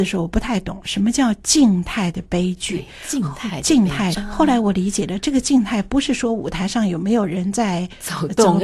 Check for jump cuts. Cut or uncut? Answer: cut